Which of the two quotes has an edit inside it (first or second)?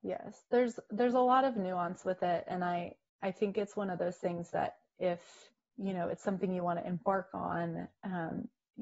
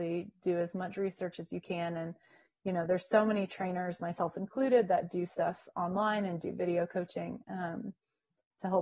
first